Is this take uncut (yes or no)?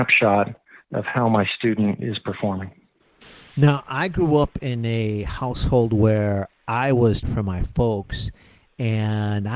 no